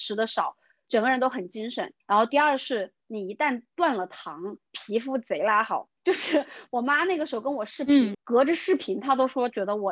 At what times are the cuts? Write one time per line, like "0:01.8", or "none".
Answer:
0:02.0
0:06.0
0:08.1